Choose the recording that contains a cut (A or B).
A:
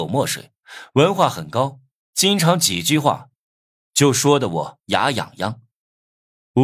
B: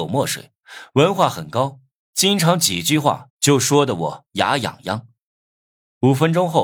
B